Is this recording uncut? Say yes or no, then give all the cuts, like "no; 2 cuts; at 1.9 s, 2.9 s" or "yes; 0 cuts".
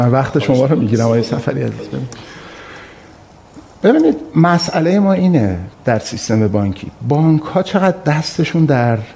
no; 1 cut; at 5.7 s